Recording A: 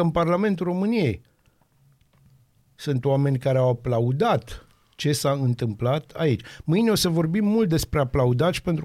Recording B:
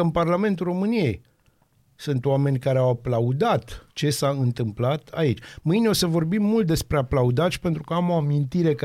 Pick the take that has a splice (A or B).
B